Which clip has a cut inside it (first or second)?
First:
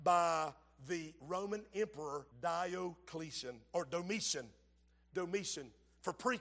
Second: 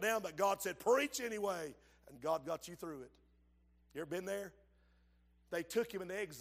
first